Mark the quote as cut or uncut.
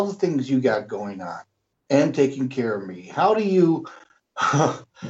cut